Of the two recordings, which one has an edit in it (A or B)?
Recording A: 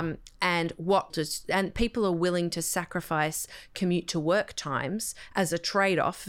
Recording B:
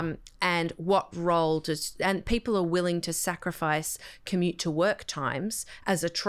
A